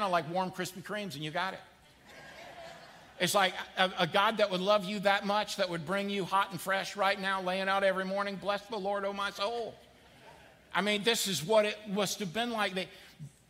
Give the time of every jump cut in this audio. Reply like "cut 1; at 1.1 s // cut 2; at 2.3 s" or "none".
none